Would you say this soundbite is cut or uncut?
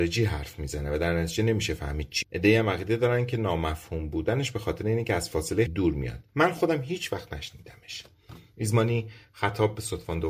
cut